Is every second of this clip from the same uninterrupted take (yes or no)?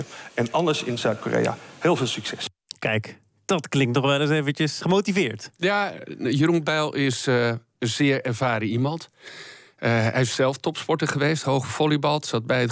no